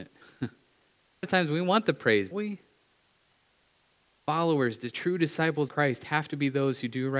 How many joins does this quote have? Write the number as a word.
three